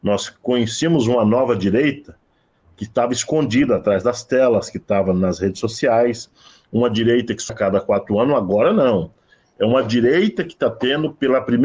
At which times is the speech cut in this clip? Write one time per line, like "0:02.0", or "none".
0:07.5

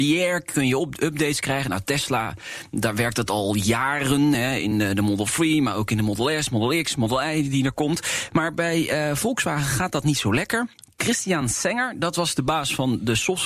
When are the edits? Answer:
none

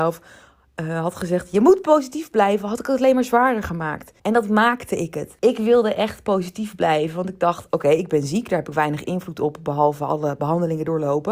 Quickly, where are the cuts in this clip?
0:04.2
0:05.4

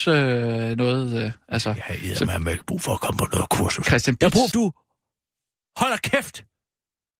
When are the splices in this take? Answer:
0:04.5

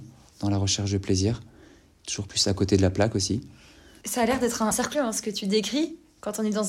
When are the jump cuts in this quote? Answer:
0:04.9

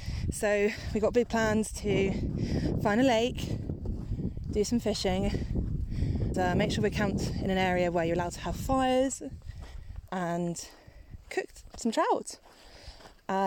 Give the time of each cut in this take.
0:06.3

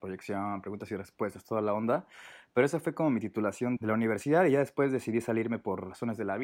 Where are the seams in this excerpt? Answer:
0:03.8

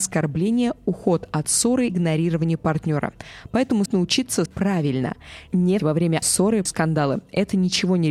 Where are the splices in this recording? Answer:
0:01.9
0:03.9
0:04.5
0:05.8
0:06.2
0:06.7

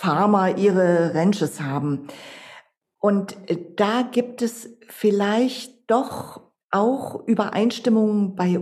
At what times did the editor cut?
none

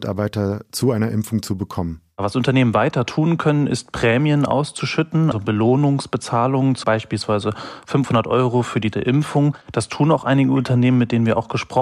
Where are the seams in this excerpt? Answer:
0:05.3
0:06.8
0:08.9
0:09.6

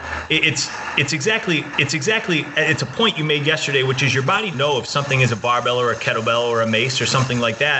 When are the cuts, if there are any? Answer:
0:01.7
0:04.5

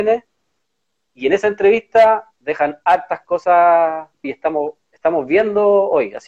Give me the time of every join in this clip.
0:04.2

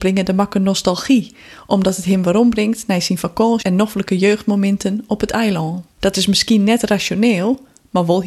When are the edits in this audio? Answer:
0:03.6
0:05.9

